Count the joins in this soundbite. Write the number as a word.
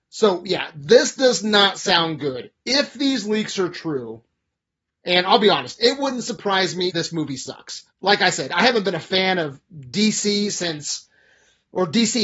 two